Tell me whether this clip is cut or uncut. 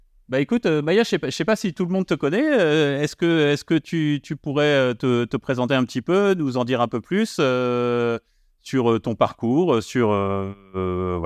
uncut